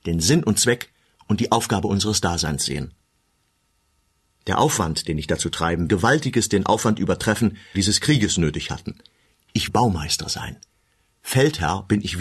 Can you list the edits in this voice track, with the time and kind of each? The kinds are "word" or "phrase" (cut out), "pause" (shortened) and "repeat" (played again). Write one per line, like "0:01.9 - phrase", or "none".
0:05.9 - phrase
0:07.7 - phrase
0:09.7 - word